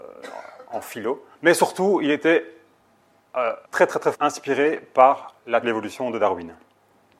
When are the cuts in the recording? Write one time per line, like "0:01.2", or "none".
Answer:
0:01.3
0:03.6
0:04.1
0:05.6